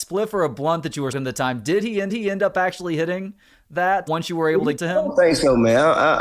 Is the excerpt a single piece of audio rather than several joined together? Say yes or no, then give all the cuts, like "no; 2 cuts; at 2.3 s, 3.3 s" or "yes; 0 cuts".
no; 4 cuts; at 1.1 s, 2.1 s, 4.1 s, 4.8 s